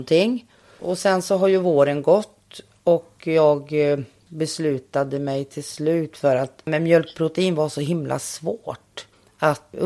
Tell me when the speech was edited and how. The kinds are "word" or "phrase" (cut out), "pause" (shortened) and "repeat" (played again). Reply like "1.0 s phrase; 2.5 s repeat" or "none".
none